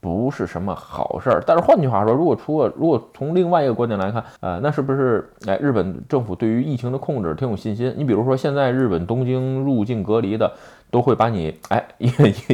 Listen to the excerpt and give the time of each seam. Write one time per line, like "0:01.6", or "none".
0:04.4